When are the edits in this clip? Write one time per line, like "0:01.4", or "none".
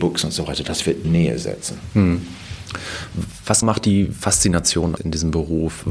0:01.0
0:03.6
0:05.0